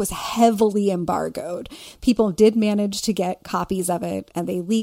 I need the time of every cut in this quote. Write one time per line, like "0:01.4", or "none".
none

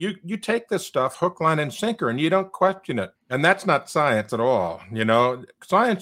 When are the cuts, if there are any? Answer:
0:03.2

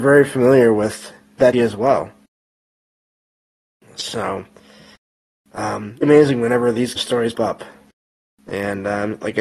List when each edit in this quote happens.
0:01.5
0:06.0
0:07.0
0:07.3

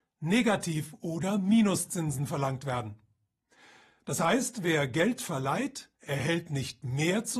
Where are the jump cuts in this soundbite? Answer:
0:06.0

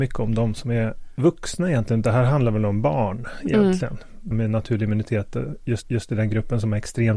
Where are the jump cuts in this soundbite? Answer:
0:04.3
0:05.8

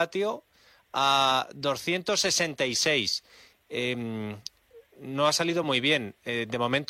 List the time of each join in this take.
none

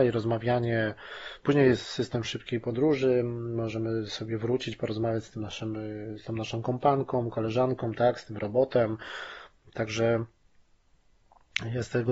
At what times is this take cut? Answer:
none

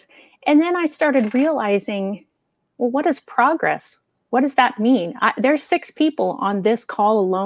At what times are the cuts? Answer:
none

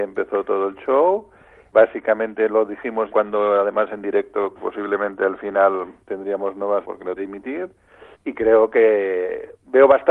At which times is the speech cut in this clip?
0:01.7
0:03.1
0:04.5
0:06.0
0:06.8
0:07.2
0:08.1

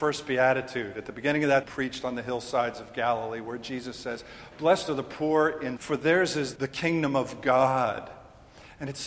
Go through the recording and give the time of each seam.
0:01.6
0:05.8
0:06.6

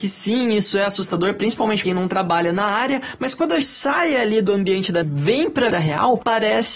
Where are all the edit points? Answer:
0:01.8
0:03.6
0:05.0
0:05.7

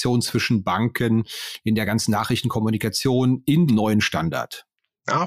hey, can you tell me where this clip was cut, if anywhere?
0:03.7

